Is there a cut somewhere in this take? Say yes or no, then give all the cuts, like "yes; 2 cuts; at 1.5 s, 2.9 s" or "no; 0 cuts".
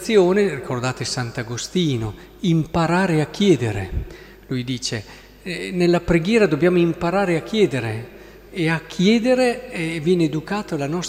no; 0 cuts